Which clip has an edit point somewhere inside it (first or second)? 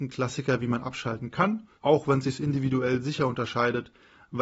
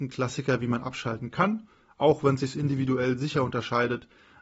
first